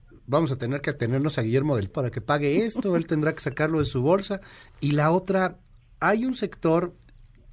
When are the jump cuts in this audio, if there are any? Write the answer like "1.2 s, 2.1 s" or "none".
1.9 s